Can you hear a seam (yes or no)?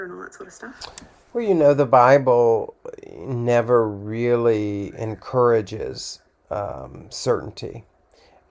no